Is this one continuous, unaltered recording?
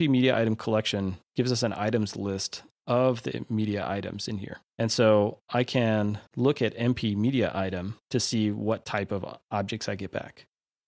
no; 4 cuts; at 1.2 s, 4.7 s, 6.3 s, 8.0 s

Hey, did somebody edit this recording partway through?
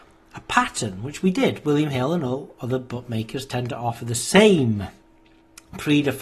no; 0 cuts

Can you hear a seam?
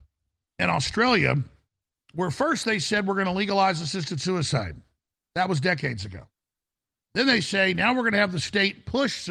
no; 0 cuts

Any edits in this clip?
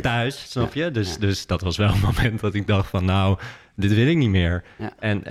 no; 0 cuts

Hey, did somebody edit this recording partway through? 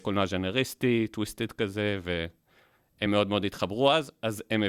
no; 0 cuts

